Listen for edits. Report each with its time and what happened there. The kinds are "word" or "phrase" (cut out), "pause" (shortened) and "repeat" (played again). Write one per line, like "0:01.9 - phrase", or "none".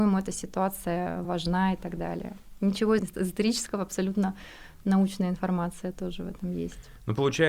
0:01.2 - word
0:03.0 - word